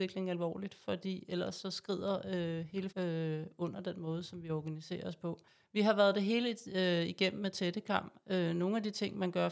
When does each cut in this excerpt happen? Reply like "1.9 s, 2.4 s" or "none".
2.9 s, 5.5 s